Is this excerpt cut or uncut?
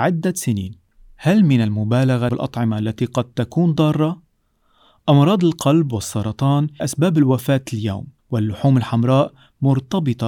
cut